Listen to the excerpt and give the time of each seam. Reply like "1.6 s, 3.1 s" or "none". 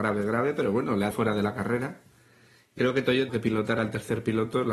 1.1 s, 2.8 s, 3.3 s